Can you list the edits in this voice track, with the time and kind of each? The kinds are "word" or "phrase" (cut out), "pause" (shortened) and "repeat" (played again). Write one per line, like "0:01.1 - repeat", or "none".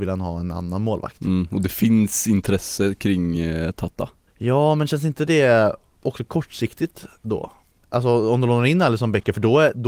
none

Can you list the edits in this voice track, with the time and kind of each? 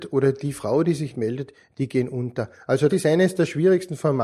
0:01.1 - word
0:02.9 - word

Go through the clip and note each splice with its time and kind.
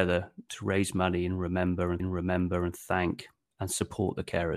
0:02.0 - repeat

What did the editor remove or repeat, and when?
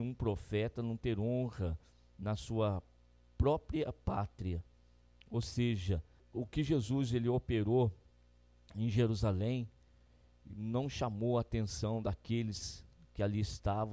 none

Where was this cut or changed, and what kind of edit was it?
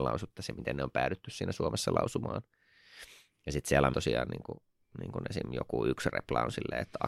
0:03.9 - phrase

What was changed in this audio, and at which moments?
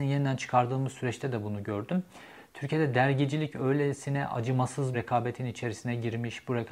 0:04.9 - word

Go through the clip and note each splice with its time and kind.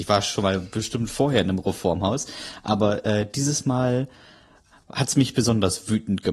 none

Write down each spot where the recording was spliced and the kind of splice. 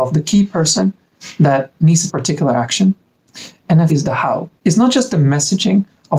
0:02.1 - phrase
0:03.9 - word
0:04.6 - pause

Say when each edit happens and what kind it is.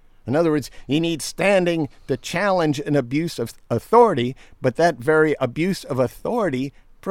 none

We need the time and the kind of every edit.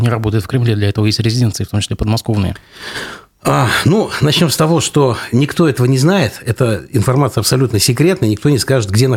none

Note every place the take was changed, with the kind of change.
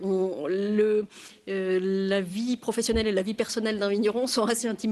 none

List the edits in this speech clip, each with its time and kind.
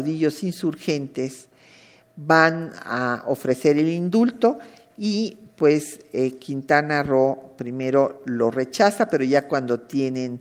none

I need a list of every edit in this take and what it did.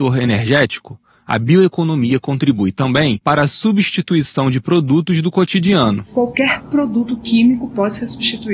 none

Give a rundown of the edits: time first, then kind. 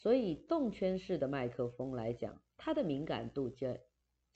0:02.5 - pause

